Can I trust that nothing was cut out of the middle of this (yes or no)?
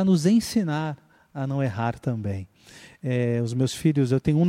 yes